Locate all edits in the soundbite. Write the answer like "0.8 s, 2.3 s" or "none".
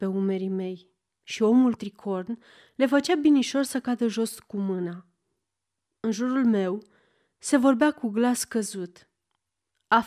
1.8 s